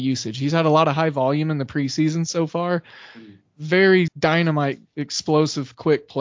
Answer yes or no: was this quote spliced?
yes